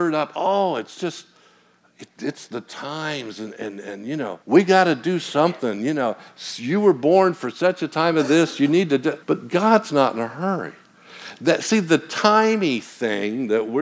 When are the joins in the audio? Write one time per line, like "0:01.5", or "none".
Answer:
0:04.4
0:09.2